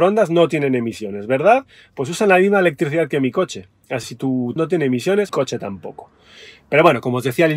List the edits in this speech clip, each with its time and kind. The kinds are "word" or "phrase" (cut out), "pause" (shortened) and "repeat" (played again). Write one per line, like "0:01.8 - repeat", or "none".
0:04.0 - word
0:04.6 - word
0:05.3 - word